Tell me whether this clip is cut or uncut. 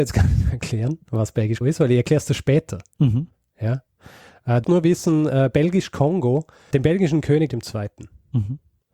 cut